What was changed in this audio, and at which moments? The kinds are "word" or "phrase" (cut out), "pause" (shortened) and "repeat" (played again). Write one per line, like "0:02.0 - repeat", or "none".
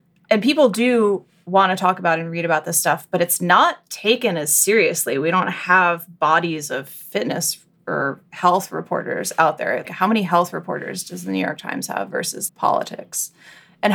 0:09.8 - word
0:12.5 - word